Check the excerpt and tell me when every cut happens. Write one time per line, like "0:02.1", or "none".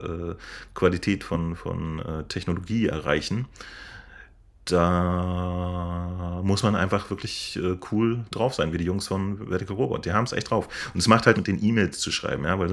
0:11.3